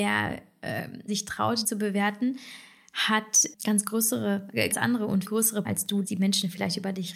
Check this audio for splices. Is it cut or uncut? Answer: cut